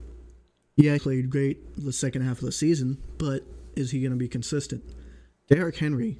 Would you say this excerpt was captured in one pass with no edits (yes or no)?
no